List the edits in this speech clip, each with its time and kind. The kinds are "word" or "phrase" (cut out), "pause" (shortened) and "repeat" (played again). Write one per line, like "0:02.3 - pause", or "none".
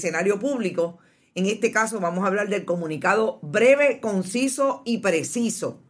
none